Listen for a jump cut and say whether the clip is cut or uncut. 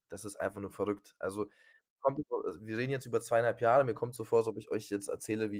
uncut